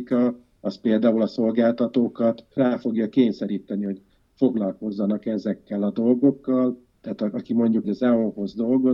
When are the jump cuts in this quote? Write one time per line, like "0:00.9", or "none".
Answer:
0:07.8